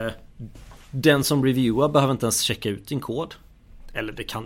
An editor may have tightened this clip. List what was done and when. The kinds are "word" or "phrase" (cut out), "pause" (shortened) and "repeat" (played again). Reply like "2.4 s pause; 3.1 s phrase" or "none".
none